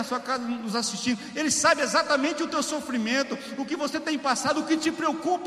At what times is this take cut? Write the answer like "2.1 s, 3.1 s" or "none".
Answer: none